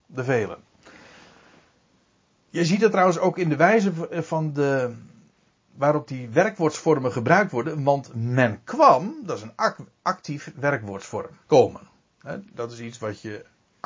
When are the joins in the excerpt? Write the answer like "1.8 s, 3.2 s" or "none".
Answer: 11.4 s

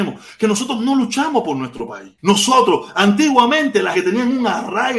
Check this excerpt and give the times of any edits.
2.2 s, 3.9 s

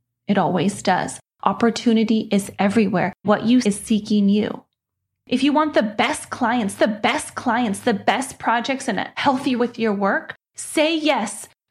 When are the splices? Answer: 3.2 s, 3.6 s, 6.8 s, 9.6 s

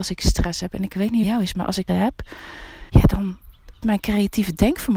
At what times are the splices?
1.2 s, 1.9 s, 2.9 s, 3.8 s

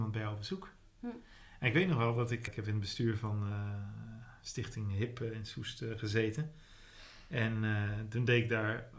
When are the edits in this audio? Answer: 2.5 s

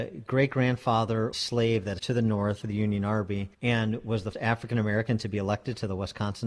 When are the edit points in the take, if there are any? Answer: 1.3 s, 2.0 s, 2.6 s, 3.5 s, 4.3 s

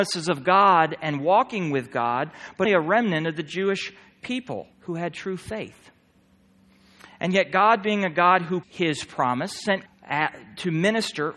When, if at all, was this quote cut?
2.6 s, 4.7 s, 8.6 s, 9.9 s

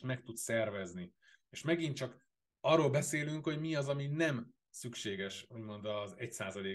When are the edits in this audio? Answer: none

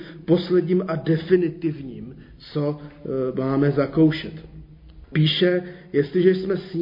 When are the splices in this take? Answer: none

